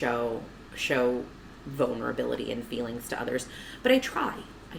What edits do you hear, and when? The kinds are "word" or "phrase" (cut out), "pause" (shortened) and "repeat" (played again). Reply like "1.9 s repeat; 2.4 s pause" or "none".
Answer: none